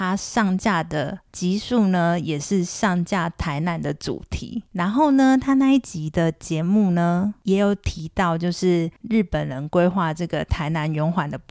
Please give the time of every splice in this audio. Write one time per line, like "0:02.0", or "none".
0:09.0